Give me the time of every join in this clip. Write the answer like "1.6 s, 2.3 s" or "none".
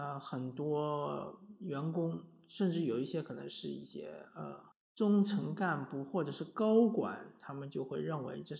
4.7 s